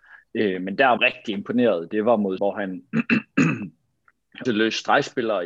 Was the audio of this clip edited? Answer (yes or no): yes